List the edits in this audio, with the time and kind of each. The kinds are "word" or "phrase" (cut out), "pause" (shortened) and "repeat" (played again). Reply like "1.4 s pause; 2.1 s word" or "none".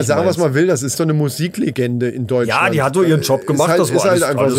0.9 s word